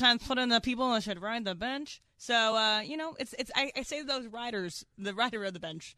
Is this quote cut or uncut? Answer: uncut